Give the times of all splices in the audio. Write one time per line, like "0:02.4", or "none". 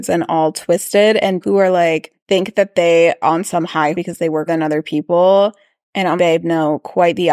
0:01.4
0:03.2
0:03.9
0:04.5
0:06.2